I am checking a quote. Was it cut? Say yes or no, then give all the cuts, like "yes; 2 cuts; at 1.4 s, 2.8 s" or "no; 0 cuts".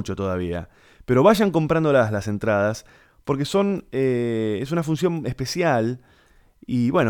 no; 0 cuts